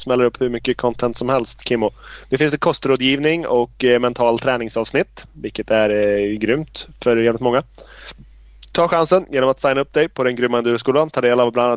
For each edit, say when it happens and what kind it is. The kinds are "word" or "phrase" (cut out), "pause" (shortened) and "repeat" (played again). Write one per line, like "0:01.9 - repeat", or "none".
none